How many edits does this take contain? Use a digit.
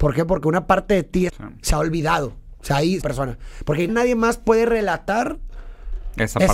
3